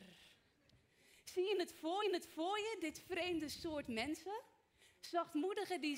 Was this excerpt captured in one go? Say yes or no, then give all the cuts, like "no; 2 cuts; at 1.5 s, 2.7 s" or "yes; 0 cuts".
no; 1 cut; at 2.0 s